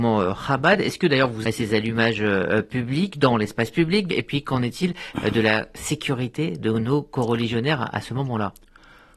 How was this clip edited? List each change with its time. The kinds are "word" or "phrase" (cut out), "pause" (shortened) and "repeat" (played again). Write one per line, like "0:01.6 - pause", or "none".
0:01.4 - word
0:04.1 - word